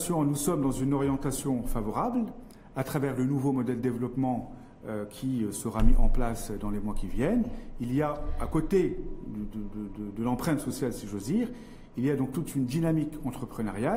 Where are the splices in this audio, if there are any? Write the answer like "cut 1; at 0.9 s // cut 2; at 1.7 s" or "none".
none

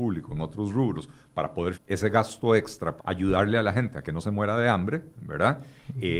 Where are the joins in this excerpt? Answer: cut 1; at 1.7 s // cut 2; at 3.0 s

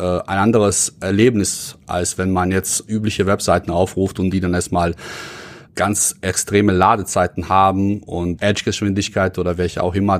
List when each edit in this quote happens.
cut 1; at 5.7 s // cut 2; at 8.4 s

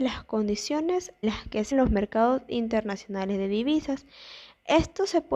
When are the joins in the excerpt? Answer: cut 1; at 1.2 s // cut 2; at 1.7 s

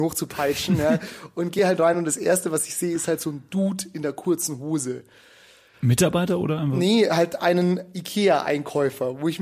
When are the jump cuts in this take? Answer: none

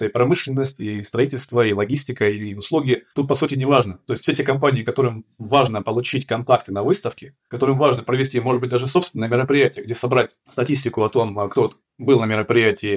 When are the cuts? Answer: none

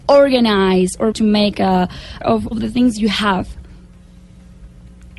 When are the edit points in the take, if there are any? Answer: cut 1; at 1.1 s // cut 2; at 1.5 s // cut 3; at 2.2 s // cut 4; at 2.5 s

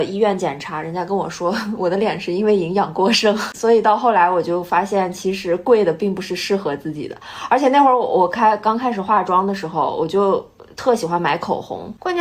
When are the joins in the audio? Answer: none

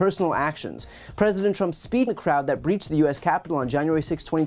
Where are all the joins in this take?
cut 1; at 2.1 s

